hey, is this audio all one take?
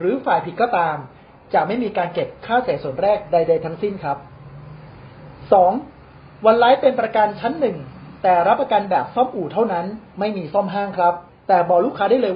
no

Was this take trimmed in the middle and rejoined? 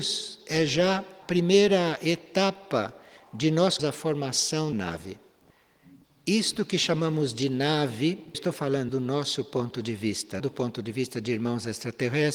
yes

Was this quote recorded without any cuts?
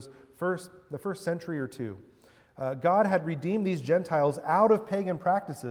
yes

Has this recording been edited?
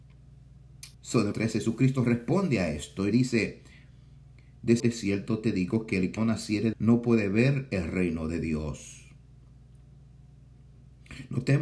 yes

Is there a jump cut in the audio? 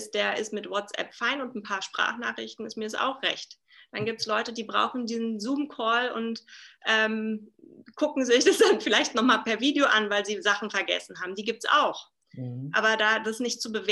no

